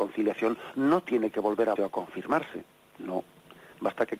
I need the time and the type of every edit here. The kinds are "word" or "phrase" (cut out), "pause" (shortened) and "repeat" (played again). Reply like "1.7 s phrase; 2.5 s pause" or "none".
1.8 s word